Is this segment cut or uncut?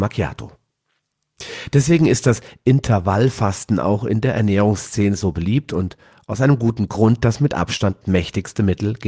uncut